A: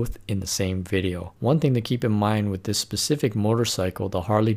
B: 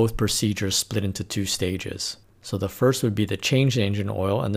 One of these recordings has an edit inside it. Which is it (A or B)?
A